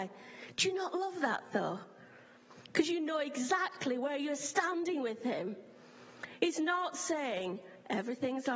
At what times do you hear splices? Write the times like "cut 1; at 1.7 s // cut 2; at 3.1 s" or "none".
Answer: none